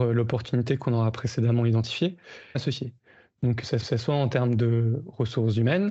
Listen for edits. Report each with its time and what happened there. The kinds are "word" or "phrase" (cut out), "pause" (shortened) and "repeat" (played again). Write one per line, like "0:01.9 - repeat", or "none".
0:02.5 - phrase
0:03.8 - repeat